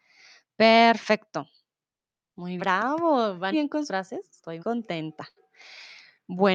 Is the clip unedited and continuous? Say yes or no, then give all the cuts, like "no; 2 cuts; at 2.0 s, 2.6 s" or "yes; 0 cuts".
no; 4 cuts; at 2.6 s, 3.5 s, 3.9 s, 4.6 s